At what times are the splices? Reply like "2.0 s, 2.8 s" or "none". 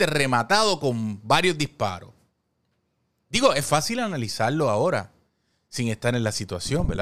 none